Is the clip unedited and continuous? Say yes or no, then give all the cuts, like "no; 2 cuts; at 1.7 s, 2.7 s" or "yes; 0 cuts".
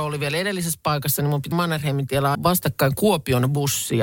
no; 2 cuts; at 1.5 s, 2.3 s